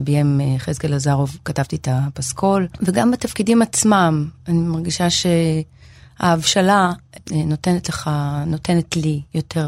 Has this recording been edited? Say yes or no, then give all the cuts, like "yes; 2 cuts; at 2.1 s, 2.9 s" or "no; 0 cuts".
no; 0 cuts